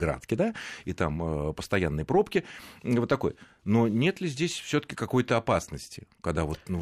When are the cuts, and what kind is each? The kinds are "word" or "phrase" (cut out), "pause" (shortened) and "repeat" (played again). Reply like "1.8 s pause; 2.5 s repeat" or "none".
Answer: none

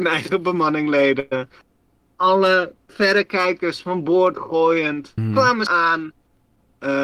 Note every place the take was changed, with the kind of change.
2.9 s word; 5.2 s word; 5.7 s word

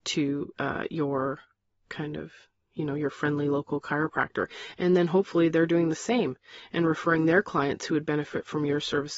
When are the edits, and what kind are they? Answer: none

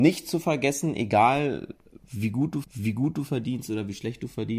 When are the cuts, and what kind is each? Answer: 2.6 s repeat

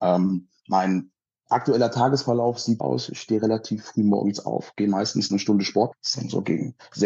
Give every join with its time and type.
2.8 s word; 5.9 s word

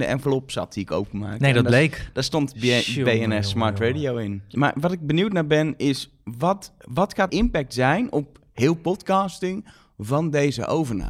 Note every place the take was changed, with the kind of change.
6.8 s pause; 7.3 s phrase

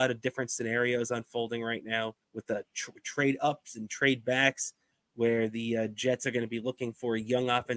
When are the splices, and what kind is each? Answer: 2.2 s pause

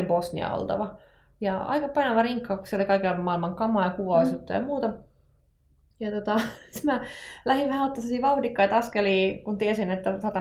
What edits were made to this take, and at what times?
none

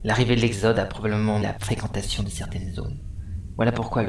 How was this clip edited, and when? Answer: 1.4 s word

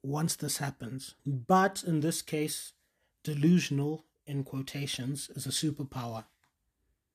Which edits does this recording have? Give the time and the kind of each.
1.2 s pause

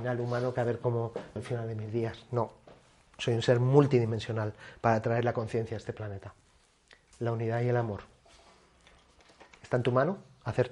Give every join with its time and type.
1.4 s word

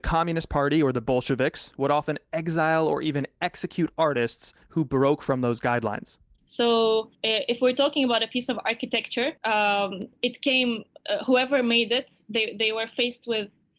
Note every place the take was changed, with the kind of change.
7.1 s pause; 9.4 s pause

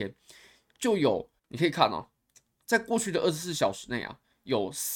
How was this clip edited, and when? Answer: 1.4 s pause

